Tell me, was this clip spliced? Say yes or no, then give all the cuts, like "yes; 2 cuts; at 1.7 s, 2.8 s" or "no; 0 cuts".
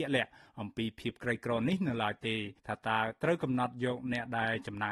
yes; 1 cut; at 2.6 s